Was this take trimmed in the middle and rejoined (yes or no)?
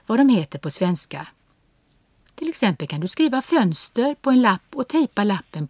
no